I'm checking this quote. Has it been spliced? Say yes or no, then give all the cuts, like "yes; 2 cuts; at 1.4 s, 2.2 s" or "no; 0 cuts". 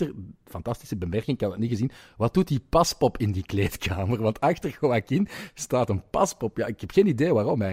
no; 0 cuts